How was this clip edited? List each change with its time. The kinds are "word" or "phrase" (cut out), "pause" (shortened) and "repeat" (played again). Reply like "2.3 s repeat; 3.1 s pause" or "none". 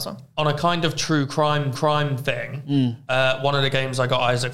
1.7 s repeat